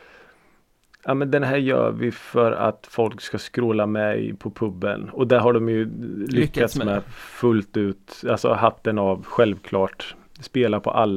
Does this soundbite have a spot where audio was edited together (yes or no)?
no